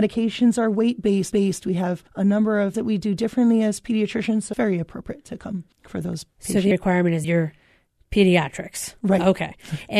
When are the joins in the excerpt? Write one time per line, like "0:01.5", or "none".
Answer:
0:01.3
0:02.1
0:02.7
0:04.5
0:05.7
0:06.7
0:07.2

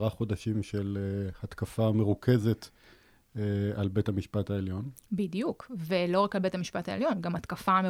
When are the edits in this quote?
none

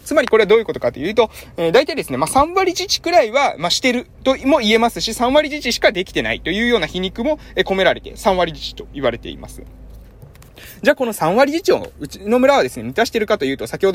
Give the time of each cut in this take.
0:04.1

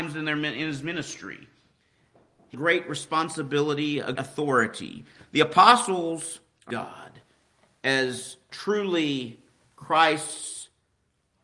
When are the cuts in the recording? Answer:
0:02.5
0:04.1
0:06.7

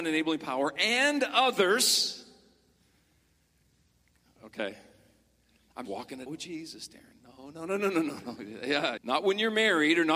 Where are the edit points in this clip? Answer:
0:05.8
0:06.3
0:09.0

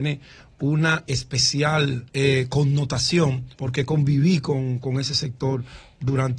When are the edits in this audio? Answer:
0:02.1
0:03.5

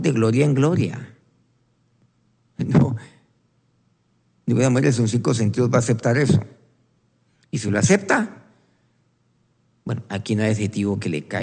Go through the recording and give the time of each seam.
none

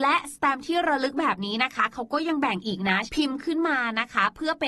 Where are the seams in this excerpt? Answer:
0:03.1

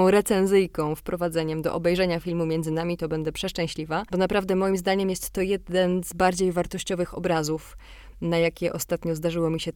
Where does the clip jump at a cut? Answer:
none

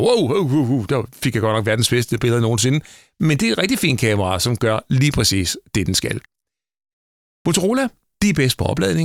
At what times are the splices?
none

